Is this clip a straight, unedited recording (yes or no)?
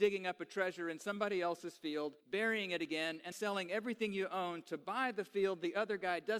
no